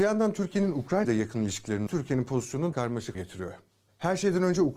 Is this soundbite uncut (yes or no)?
no